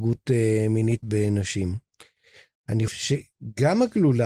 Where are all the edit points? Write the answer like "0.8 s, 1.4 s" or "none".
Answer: 1.0 s, 2.9 s